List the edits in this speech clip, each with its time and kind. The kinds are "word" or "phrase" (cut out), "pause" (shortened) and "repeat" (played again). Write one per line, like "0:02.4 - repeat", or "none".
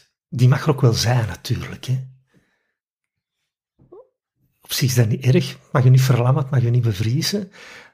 none